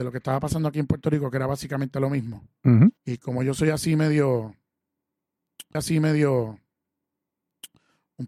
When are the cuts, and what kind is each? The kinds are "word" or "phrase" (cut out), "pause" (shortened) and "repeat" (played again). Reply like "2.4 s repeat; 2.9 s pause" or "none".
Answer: 3.0 s pause; 5.7 s repeat